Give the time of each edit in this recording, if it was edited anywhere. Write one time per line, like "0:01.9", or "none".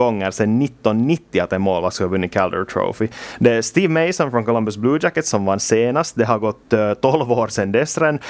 none